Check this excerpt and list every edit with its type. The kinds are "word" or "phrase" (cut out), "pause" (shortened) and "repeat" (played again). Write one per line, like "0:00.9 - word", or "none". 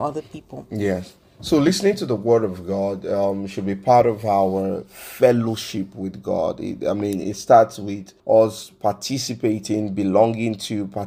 0:08.2 - pause